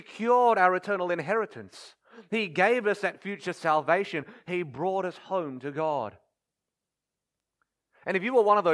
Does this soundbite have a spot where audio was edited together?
no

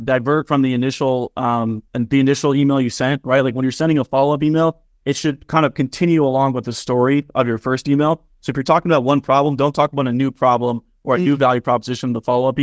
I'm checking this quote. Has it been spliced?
yes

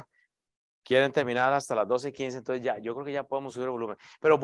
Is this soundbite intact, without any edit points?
yes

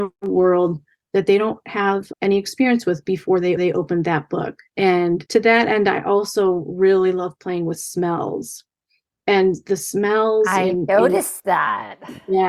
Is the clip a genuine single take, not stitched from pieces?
no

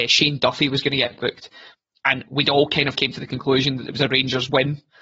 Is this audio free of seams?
yes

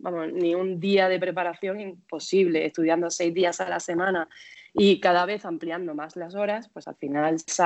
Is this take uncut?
yes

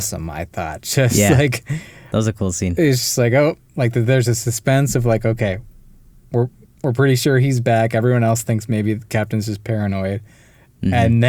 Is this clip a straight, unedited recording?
yes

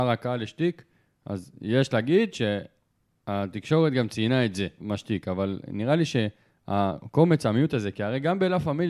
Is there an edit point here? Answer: yes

